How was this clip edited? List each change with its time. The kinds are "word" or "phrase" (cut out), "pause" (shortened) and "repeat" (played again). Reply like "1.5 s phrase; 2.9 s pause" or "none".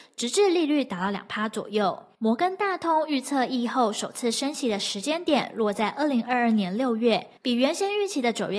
7.4 s pause

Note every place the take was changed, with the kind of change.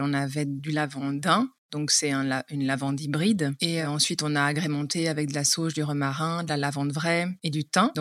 none

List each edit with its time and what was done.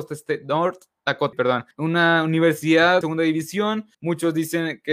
1.3 s word; 1.7 s pause; 3.0 s word; 3.9 s pause

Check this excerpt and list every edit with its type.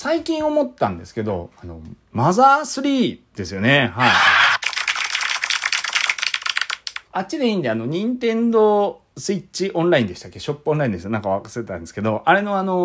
7.1 s pause; 9.1 s pause

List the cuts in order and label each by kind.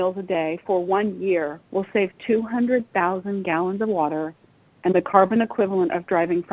1.6 s pause

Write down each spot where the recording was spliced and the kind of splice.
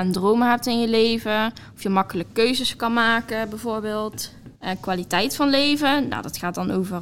4.6 s pause

